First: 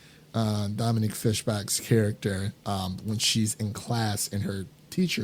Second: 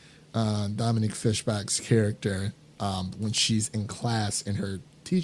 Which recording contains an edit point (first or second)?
first